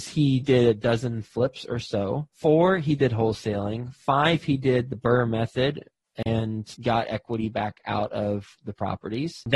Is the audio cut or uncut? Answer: cut